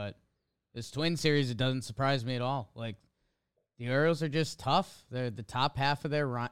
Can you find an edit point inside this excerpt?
no; 0 cuts

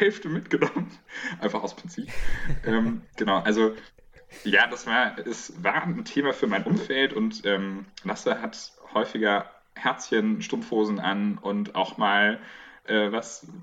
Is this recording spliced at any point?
no; 0 cuts

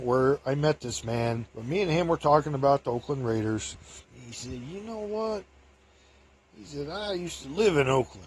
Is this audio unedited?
no; 2 cuts; at 1.5 s, 4.0 s

